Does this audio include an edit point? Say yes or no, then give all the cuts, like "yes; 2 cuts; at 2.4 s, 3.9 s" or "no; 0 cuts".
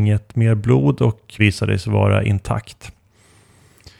yes; 1 cut; at 1.4 s